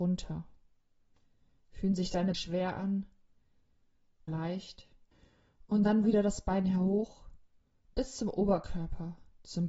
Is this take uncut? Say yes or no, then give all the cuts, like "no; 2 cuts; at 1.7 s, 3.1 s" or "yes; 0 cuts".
no; 3 cuts; at 2.3 s, 4.3 s, 6.0 s